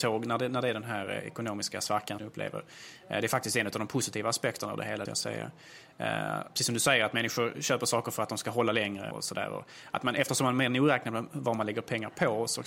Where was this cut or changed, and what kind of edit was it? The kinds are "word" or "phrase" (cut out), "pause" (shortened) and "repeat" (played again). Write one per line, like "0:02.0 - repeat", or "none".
0:02.2 - phrase
0:05.1 - phrase
0:09.1 - word